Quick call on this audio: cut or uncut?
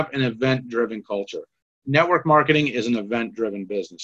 uncut